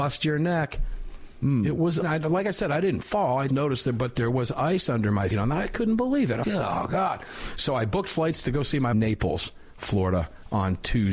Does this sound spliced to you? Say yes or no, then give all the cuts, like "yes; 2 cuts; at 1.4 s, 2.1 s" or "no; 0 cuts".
yes; 5 cuts; at 2.0 s, 3.5 s, 5.3 s, 6.4 s, 8.9 s